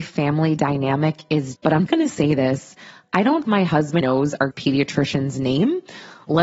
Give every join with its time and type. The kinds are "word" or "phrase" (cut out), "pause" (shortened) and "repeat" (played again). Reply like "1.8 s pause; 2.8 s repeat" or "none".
1.6 s word; 1.9 s word; 3.4 s word; 4.0 s word; 4.5 s word